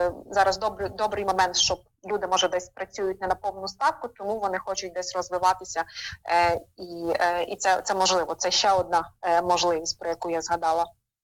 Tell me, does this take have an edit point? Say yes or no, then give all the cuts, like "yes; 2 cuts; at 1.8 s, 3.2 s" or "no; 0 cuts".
no; 0 cuts